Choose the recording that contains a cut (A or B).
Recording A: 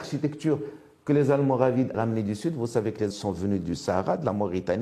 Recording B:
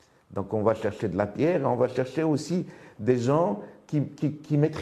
A